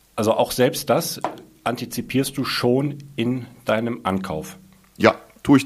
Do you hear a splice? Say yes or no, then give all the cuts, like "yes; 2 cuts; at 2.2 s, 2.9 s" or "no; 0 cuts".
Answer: no; 0 cuts